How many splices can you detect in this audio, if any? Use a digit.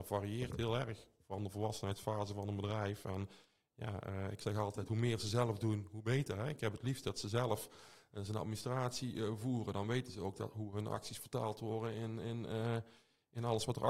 0